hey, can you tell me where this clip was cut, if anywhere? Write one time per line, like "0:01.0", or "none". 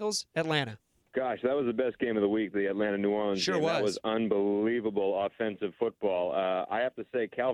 0:01.0